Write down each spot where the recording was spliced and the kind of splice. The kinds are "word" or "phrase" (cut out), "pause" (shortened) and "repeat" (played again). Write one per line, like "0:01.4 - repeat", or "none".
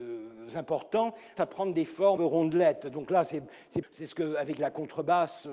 0:01.4 - word
0:02.2 - phrase
0:03.8 - word
0:04.6 - phrase